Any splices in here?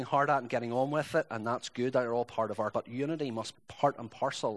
yes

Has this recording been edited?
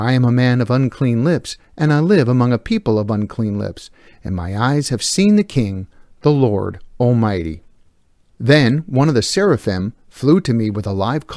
no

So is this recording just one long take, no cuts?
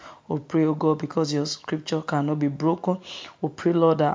yes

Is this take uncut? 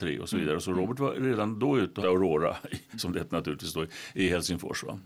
no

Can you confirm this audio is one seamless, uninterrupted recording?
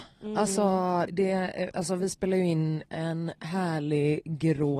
no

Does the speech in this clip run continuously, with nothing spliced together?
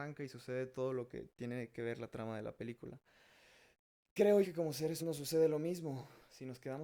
no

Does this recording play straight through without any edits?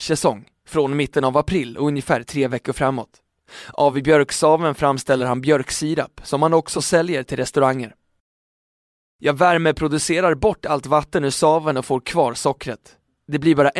yes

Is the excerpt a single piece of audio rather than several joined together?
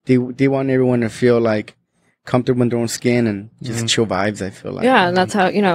yes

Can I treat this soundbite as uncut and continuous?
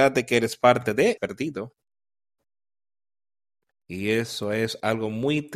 no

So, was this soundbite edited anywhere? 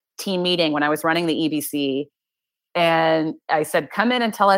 no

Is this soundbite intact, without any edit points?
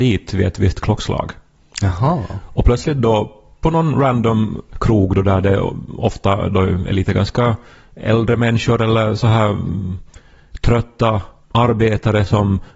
yes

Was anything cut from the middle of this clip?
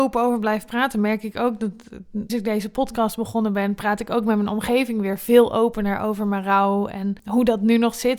yes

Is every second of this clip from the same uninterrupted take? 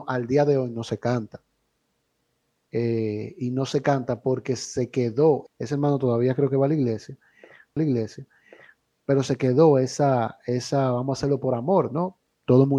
no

